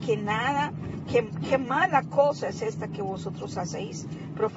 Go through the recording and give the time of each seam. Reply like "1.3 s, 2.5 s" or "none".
none